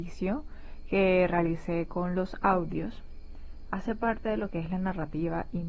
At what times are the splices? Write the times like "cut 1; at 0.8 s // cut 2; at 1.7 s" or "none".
none